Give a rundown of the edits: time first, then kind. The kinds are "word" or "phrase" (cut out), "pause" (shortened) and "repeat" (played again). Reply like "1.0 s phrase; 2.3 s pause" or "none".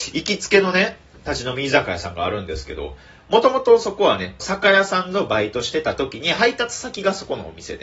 4.4 s phrase